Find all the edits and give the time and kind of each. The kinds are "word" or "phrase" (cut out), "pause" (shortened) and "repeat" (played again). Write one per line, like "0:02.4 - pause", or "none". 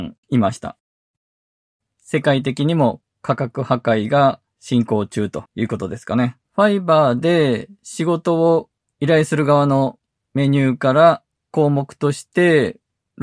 0:05.5 - pause
0:06.4 - pause
0:11.4 - pause